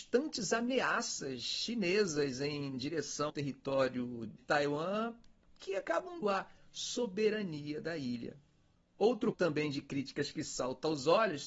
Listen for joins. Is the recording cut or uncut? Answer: cut